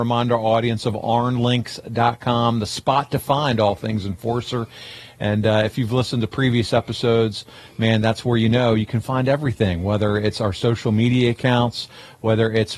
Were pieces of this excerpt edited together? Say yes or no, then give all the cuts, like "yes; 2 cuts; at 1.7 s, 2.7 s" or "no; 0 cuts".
no; 0 cuts